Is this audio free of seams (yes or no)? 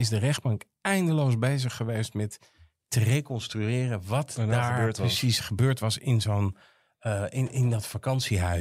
yes